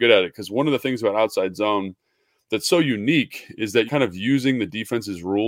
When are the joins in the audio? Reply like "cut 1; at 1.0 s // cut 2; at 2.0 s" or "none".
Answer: cut 1; at 3.9 s